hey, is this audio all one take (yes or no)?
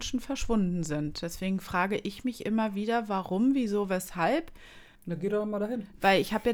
no